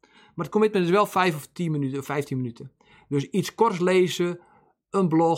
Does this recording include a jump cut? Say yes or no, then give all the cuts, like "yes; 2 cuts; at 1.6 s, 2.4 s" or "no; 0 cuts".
no; 0 cuts